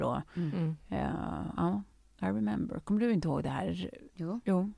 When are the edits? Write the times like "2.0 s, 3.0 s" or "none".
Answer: none